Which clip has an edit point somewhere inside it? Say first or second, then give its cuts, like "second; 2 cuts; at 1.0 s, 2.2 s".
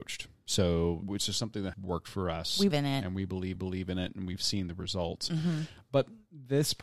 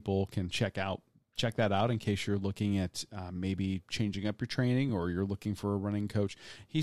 first; 4 cuts; at 1.0 s, 1.7 s, 2.7 s, 3.6 s